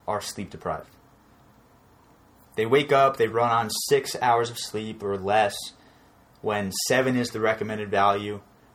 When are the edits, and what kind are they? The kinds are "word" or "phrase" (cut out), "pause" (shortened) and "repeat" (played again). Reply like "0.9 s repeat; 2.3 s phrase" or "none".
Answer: none